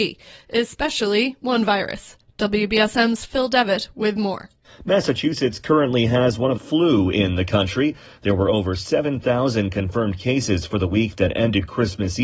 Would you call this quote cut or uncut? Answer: cut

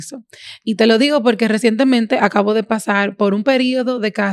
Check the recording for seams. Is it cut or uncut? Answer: uncut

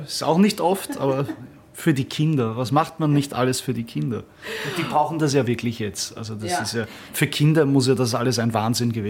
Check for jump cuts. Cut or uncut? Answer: uncut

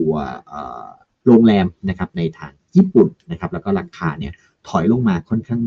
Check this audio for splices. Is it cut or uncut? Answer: uncut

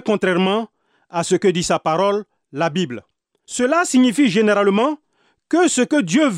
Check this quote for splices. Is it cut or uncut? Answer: uncut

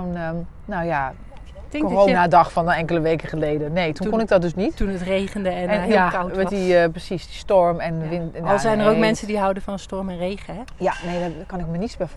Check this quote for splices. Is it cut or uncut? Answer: uncut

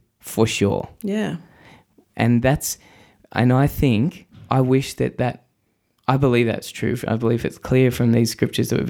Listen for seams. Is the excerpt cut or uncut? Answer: uncut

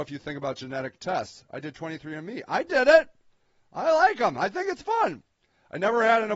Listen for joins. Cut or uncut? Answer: uncut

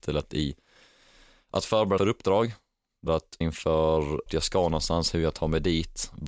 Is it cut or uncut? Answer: cut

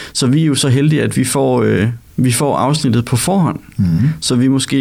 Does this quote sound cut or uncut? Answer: uncut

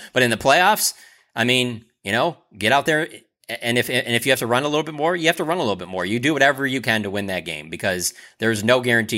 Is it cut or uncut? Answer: uncut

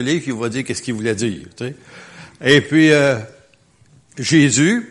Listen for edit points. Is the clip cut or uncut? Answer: uncut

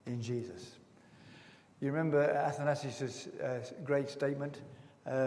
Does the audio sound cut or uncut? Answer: uncut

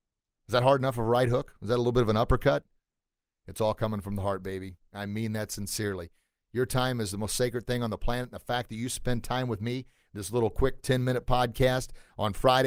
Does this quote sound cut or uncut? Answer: uncut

